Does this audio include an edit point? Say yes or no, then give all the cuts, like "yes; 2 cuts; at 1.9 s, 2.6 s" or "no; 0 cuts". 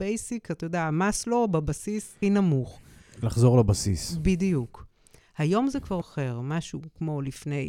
yes; 2 cuts; at 2.2 s, 6.0 s